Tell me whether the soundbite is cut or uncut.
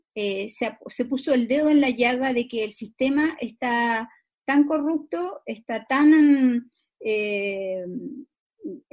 uncut